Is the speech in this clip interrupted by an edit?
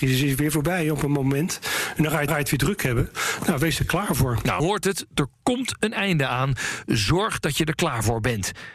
yes; 2 cuts; at 2.3 s, 4.6 s

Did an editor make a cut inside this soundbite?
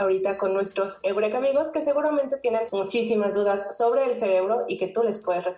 no; 0 cuts

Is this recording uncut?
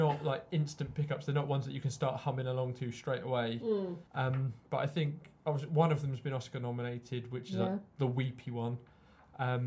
no; 1 cut; at 4.1 s

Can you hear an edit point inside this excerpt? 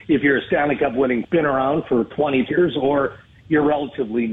yes; 2 cuts; at 1.2 s, 2.5 s

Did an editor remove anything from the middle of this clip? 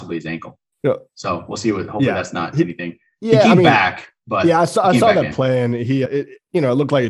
yes; 1 cut; at 6.1 s

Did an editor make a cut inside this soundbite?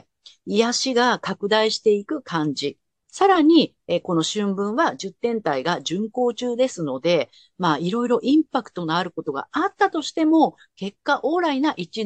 no; 0 cuts

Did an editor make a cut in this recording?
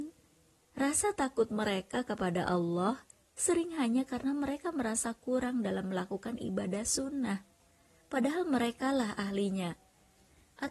no; 0 cuts

